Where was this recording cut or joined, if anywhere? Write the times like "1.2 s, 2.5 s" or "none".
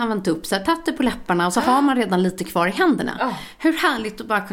none